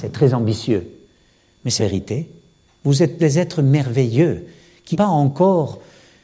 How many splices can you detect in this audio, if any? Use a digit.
3